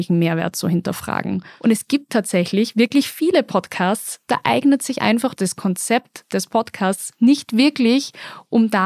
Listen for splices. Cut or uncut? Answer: uncut